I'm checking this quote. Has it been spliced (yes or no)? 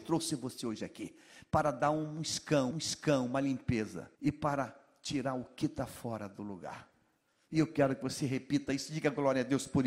yes